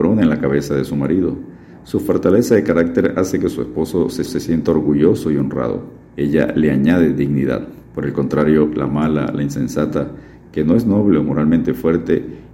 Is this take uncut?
no; 3 cuts; at 4.3 s, 6.1 s, 7.8 s

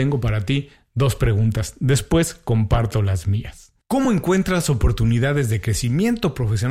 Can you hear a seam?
no; 0 cuts

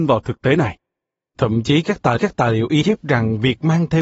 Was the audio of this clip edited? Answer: yes; 2 cuts; at 2.2 s, 2.8 s

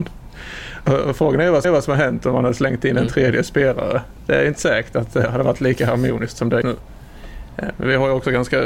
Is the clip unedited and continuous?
no; 2 cuts; at 1.6 s, 6.6 s

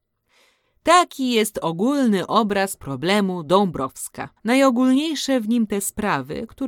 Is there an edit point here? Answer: yes; 1 cut; at 4.4 s

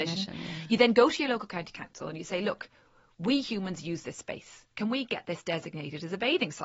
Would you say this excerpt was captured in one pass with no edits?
yes; 0 cuts

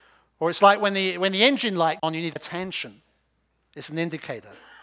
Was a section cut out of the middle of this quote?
yes; 2 cuts; at 2.0 s, 2.4 s

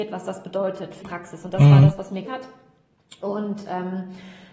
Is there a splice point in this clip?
yes; 2 cuts; at 1.0 s, 2.2 s

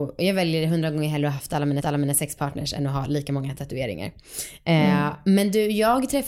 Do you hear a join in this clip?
yes; 1 cut; at 1.8 s

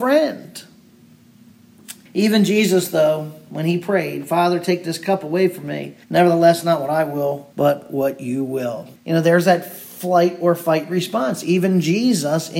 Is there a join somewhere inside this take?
yes; 4 cuts; at 2.1 s, 6.0 s, 7.5 s, 9.0 s

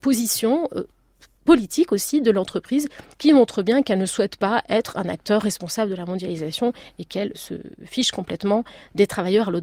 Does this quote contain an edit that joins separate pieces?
yes; 1 cut; at 7.3 s

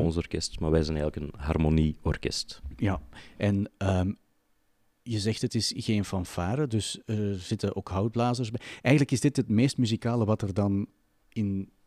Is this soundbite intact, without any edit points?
yes; 0 cuts

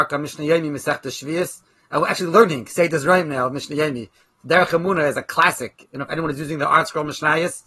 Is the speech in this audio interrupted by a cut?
no; 0 cuts

